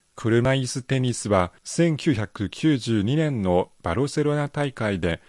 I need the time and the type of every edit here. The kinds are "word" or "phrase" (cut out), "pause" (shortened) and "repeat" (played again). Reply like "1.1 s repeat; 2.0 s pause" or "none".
1.6 s pause